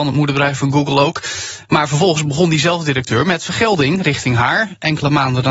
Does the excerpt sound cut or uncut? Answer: uncut